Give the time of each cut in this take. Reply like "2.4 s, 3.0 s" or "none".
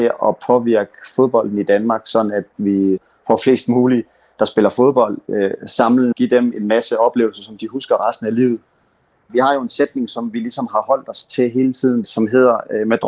6.1 s